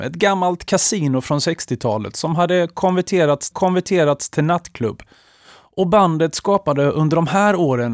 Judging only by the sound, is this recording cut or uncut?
cut